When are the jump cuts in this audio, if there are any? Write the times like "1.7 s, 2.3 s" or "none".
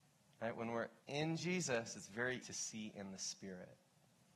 1.0 s, 2.4 s